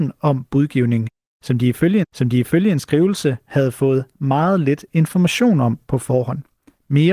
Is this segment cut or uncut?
cut